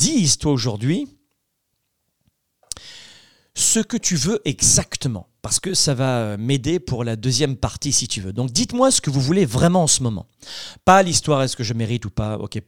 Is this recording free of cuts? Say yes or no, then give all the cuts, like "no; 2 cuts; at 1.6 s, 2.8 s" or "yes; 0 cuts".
yes; 0 cuts